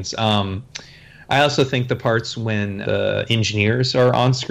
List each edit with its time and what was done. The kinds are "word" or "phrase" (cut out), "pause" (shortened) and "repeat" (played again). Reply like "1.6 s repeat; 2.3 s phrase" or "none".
2.8 s word